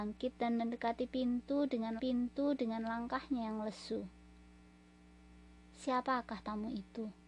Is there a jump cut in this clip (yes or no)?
yes